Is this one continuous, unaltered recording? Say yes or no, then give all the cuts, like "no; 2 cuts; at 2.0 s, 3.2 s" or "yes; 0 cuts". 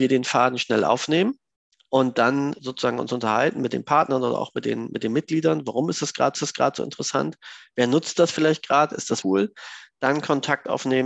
no; 3 cuts; at 2.6 s, 6.3 s, 9.2 s